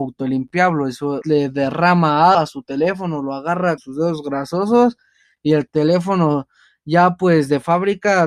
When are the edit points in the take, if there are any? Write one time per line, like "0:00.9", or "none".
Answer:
0:01.2
0:02.3
0:03.8